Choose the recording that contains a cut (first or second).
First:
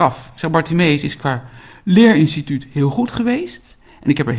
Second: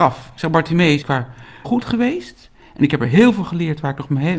second